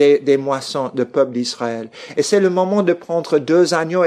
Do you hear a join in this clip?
no; 0 cuts

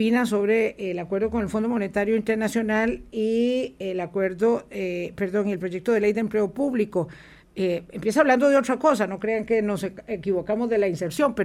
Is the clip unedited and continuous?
yes; 0 cuts

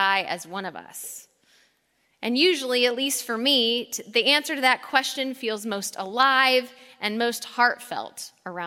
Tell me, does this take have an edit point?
no; 0 cuts

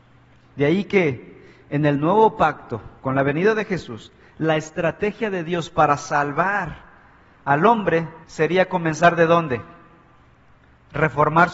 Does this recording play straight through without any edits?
no; 2 cuts; at 3.0 s, 8.2 s

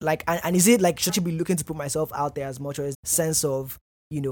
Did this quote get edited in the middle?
yes; 2 cuts; at 1.1 s, 2.9 s

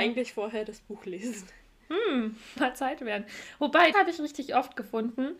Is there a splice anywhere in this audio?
yes; 2 cuts; at 2.6 s, 3.9 s

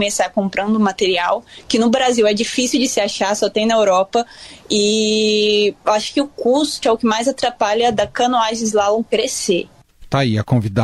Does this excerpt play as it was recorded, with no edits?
no; 1 cut; at 6.8 s

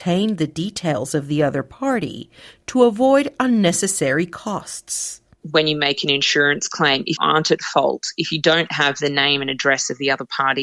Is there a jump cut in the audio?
yes; 1 cut; at 7.2 s

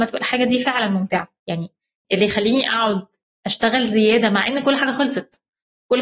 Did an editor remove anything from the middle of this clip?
no; 0 cuts

